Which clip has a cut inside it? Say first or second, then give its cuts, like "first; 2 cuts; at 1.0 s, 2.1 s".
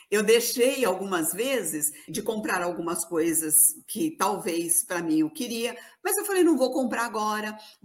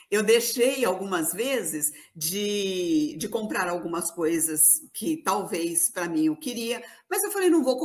first; 1 cut; at 2.1 s